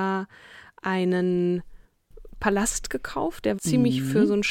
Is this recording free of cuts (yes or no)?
no